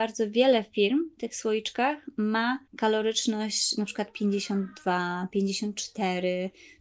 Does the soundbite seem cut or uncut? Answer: cut